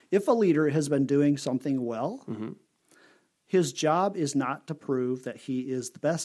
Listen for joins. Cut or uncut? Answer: uncut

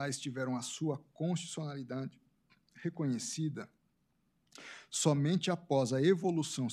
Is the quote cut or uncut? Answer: uncut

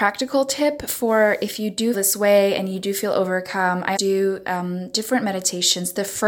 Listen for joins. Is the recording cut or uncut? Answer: cut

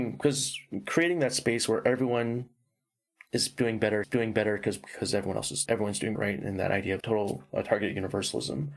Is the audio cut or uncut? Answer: cut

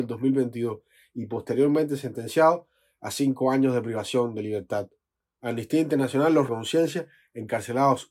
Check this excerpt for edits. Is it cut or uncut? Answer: cut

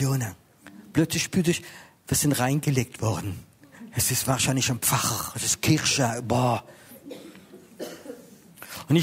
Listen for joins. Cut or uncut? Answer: uncut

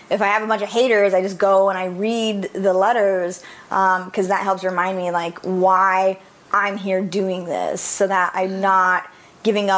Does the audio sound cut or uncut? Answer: uncut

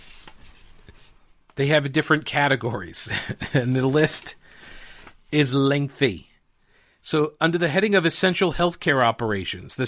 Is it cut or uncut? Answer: uncut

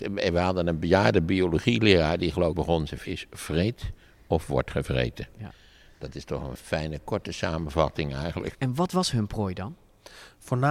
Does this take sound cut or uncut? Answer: cut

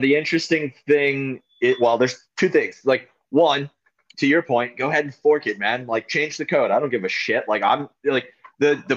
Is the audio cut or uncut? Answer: uncut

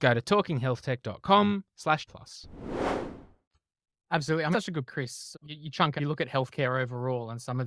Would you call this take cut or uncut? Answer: cut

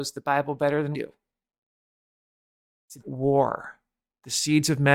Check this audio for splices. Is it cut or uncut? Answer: cut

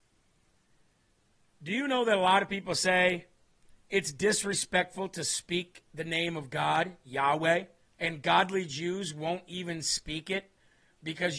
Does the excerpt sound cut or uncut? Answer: cut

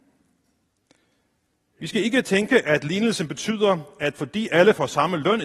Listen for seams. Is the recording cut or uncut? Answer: uncut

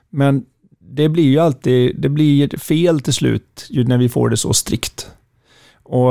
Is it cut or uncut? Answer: uncut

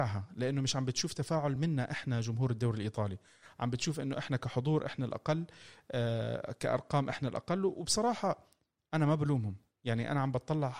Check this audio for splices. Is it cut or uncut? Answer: uncut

